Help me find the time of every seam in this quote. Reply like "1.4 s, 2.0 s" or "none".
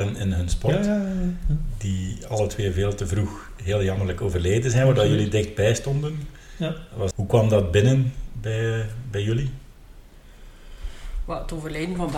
7.1 s

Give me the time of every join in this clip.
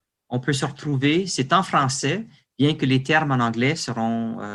none

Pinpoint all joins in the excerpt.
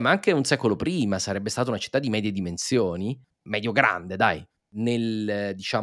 none

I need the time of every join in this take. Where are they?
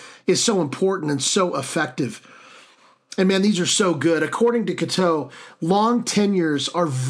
none

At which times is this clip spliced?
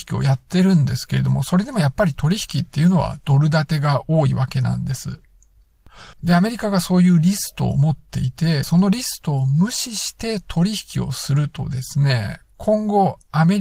6.1 s, 8.6 s

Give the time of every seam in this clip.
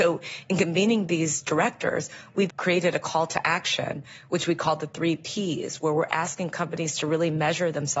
2.5 s

